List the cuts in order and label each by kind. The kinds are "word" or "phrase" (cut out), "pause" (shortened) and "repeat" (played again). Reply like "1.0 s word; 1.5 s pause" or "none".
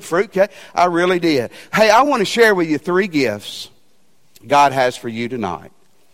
none